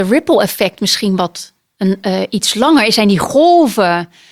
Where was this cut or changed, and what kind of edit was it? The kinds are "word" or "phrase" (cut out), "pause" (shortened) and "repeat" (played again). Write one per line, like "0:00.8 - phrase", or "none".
0:01.6 - pause